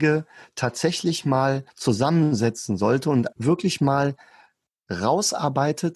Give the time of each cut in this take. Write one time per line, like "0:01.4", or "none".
0:01.7
0:03.3